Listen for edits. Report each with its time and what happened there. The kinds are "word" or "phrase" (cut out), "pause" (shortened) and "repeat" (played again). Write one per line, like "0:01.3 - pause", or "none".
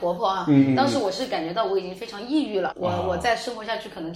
0:02.7 - word